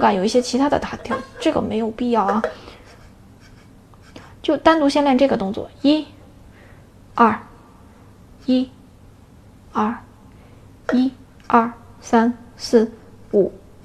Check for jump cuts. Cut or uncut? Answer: uncut